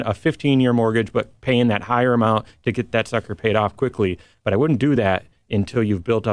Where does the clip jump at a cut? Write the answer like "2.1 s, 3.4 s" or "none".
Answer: none